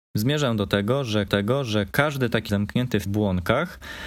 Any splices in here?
yes; 3 cuts; at 1.3 s, 2.5 s, 3.1 s

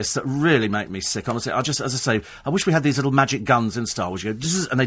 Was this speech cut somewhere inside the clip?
no; 0 cuts

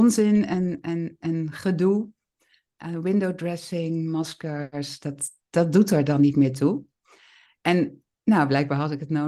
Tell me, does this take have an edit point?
no; 0 cuts

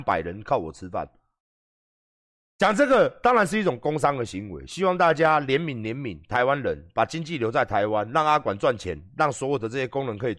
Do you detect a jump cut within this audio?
no; 0 cuts

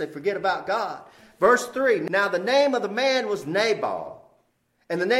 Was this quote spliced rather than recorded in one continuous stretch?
no; 0 cuts

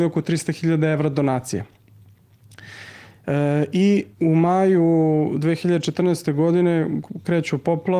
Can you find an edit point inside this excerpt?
yes; 1 cut; at 4.1 s

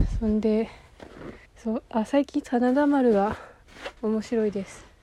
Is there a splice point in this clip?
yes; 2 cuts; at 1.5 s, 4.0 s

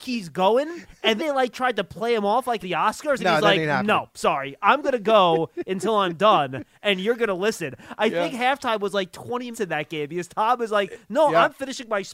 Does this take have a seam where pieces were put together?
yes; 3 cuts; at 1.2 s, 2.6 s, 9.5 s

